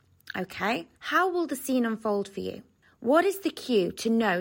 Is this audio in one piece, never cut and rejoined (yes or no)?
no